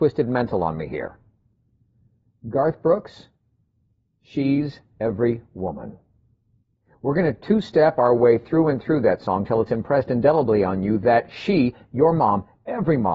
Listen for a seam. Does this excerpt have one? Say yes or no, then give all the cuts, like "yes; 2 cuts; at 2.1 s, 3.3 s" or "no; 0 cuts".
no; 0 cuts